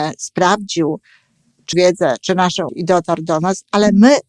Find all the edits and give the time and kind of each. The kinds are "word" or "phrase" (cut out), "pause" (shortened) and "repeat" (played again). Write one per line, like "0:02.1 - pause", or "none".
0:01.7 - word
0:02.7 - word

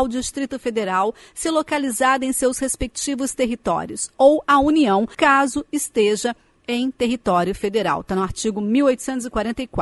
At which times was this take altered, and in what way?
none

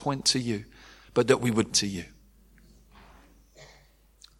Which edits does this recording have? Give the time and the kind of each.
0:01.7 - word

